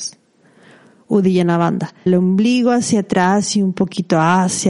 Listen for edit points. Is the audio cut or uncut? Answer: cut